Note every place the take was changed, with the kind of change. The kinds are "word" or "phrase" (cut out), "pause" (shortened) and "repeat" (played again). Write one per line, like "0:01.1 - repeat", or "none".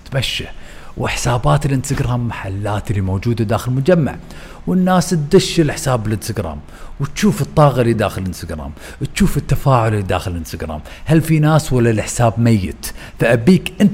none